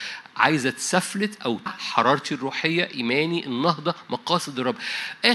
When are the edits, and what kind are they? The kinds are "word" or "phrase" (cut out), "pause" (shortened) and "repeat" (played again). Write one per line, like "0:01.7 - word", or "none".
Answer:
0:01.7 - word